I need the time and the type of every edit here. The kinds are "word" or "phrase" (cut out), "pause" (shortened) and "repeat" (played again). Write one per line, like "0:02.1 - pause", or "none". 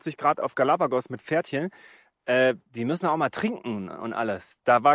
0:02.6 - pause